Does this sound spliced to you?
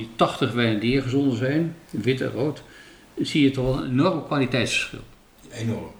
no; 0 cuts

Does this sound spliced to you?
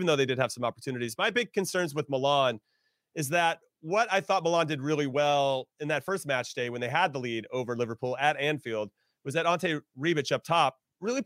no; 0 cuts

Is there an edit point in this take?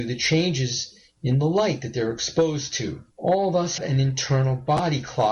yes; 2 cuts; at 3.1 s, 3.8 s

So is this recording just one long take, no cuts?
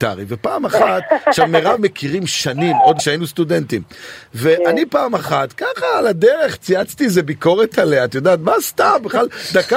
no; 2 cuts; at 1.8 s, 3.0 s

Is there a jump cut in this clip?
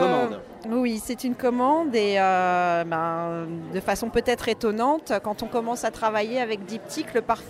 no; 0 cuts

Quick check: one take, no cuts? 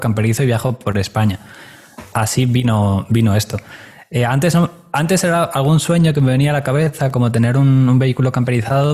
yes; 0 cuts

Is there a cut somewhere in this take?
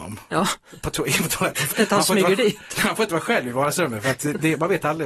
yes; 1 cut; at 1.7 s

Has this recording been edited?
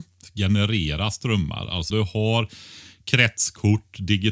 yes; 1 cut; at 1.9 s

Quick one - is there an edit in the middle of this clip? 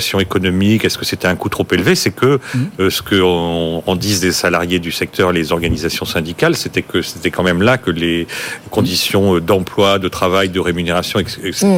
no; 0 cuts

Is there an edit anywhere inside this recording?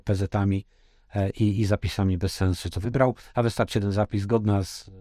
no; 0 cuts

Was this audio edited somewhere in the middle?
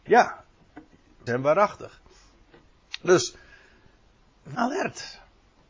yes; 2 cuts; at 1.3 s, 4.5 s

